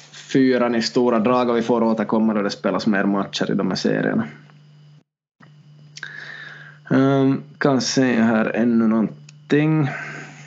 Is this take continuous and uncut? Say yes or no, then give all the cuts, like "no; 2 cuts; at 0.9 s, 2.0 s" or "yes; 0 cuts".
no; 1 cut; at 7.5 s